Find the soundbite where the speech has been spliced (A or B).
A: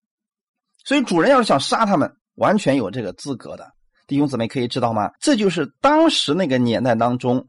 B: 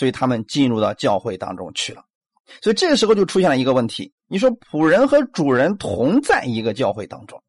A